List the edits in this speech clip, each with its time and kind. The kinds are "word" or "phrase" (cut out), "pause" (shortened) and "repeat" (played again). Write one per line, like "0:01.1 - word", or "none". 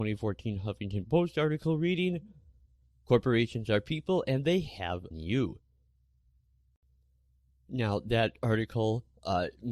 0:05.1 - phrase